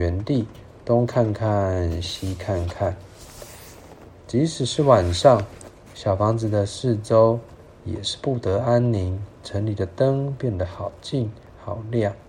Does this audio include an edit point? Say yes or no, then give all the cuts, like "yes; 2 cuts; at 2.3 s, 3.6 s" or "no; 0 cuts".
no; 0 cuts